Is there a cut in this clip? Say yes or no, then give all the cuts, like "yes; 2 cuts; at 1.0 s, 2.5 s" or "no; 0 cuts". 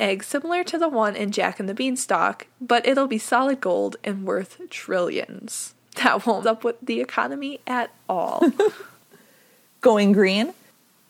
yes; 3 cuts; at 5.8 s, 6.4 s, 8.9 s